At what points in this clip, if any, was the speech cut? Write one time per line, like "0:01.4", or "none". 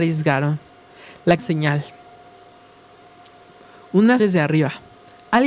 0:01.4
0:04.2